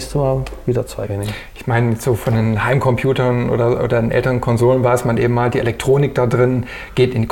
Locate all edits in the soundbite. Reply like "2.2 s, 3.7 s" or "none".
1.1 s